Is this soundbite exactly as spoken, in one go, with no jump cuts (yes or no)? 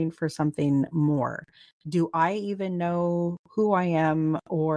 yes